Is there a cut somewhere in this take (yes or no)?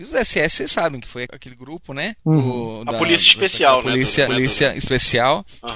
yes